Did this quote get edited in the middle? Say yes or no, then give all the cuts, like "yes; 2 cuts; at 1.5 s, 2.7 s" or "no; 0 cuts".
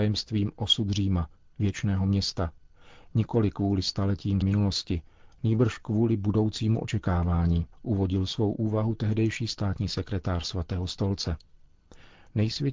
yes; 2 cuts; at 4.4 s, 7.7 s